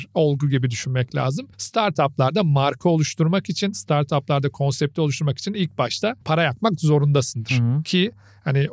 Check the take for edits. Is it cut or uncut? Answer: cut